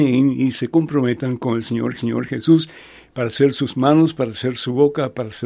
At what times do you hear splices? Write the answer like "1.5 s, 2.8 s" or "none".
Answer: 2.0 s